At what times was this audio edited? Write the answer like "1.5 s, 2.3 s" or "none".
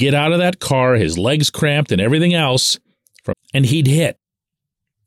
3.3 s